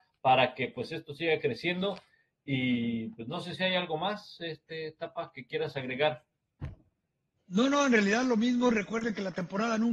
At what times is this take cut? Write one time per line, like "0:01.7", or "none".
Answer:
none